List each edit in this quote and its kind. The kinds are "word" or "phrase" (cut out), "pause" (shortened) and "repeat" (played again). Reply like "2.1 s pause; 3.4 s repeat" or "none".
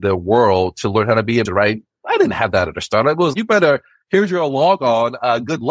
1.4 s word; 3.3 s word

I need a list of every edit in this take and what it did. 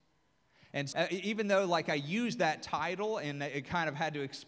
0.9 s word

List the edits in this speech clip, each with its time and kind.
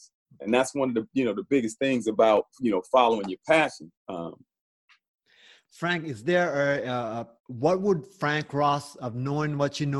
3.9 s pause; 7.4 s pause

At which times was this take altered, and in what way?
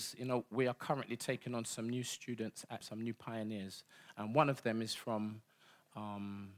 2.8 s word

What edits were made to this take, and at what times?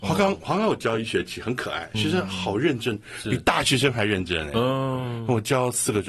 1.9 s word

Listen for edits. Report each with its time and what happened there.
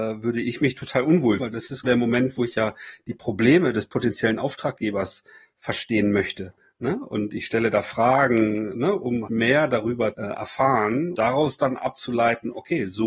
1.4 s word; 1.8 s word; 8.7 s word; 9.3 s word; 10.1 s word; 11.1 s word

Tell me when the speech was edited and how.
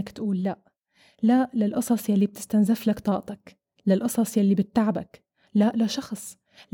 none

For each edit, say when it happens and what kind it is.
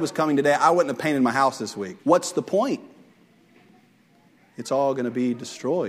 2.0 s pause

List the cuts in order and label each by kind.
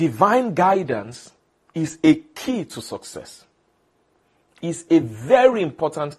none

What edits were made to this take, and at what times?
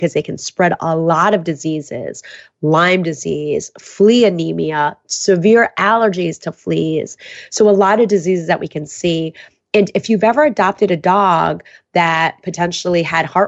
none

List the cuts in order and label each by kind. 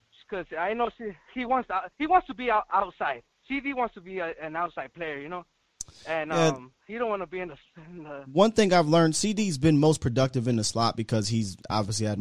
1.9 s pause; 3.3 s pause

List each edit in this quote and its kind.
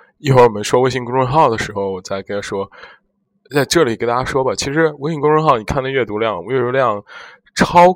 none

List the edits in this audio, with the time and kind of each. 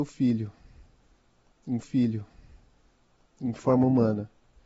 1.8 s repeat

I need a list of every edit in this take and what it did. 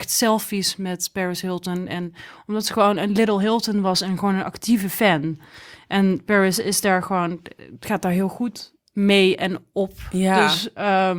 none

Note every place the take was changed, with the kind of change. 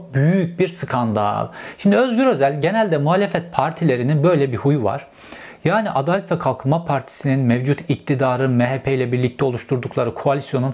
none

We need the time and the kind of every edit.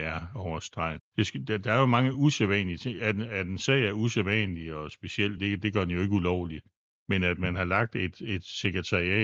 none

